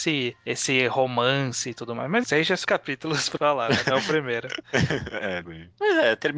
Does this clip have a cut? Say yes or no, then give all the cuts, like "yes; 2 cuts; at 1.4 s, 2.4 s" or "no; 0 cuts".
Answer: yes; 4 cuts; at 2.2 s, 2.6 s, 3.4 s, 5.4 s